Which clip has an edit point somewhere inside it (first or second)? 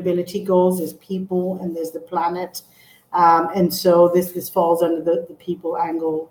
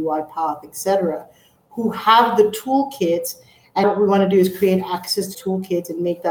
second